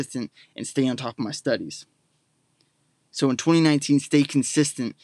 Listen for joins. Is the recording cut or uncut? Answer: uncut